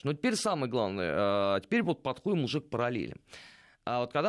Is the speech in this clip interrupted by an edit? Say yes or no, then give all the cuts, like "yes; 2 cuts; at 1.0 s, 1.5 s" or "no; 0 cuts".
no; 0 cuts